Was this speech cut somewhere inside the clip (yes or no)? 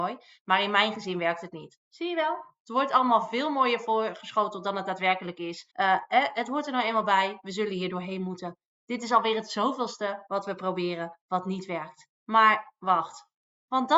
yes